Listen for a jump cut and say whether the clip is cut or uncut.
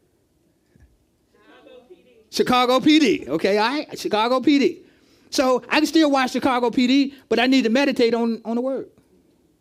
uncut